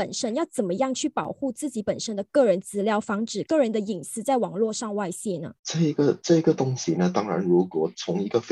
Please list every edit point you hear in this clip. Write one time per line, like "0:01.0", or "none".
0:05.6